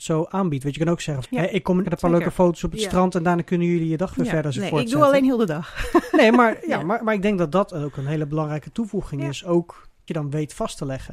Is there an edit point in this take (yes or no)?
yes